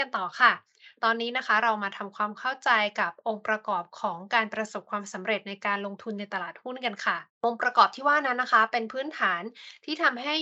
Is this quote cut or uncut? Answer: cut